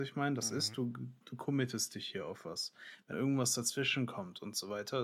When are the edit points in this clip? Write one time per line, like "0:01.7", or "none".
0:01.2
0:03.1